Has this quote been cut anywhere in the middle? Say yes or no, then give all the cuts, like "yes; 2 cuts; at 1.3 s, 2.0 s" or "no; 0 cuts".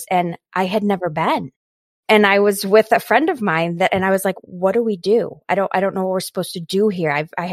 no; 0 cuts